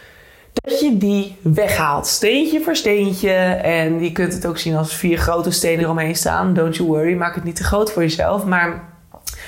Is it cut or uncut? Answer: cut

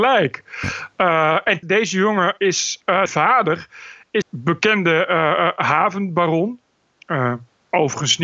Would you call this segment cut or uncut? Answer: cut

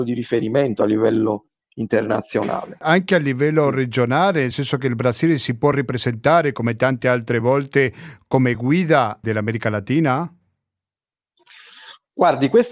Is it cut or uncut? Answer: uncut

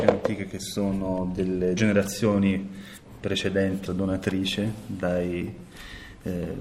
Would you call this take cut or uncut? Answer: cut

